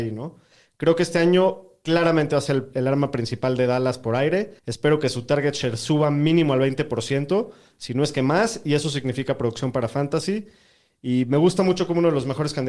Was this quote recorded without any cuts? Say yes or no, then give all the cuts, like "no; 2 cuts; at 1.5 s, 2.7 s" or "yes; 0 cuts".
no; 1 cut; at 4.6 s